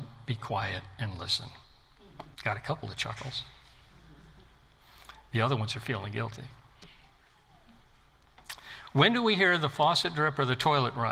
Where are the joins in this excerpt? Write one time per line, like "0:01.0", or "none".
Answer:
0:02.3